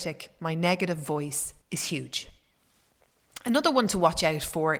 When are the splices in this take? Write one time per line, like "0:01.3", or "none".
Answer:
0:01.6